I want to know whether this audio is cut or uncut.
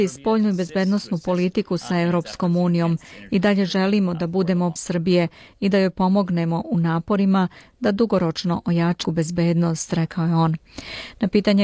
cut